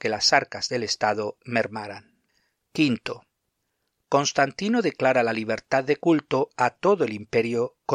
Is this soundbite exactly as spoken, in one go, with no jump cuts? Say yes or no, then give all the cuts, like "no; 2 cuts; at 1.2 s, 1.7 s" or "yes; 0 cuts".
yes; 0 cuts